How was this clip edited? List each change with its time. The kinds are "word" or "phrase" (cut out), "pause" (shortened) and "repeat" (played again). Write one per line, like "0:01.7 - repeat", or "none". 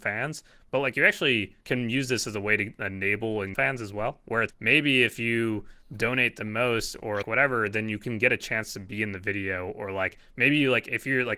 0:01.6 - pause
0:03.5 - phrase
0:04.5 - word
0:07.2 - word